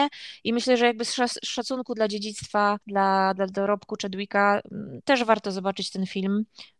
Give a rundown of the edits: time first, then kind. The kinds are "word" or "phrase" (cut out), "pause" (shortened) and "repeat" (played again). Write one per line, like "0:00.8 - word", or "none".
0:02.8 - pause